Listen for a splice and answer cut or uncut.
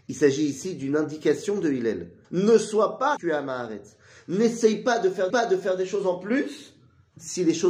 cut